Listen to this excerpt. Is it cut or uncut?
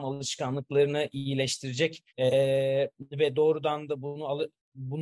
cut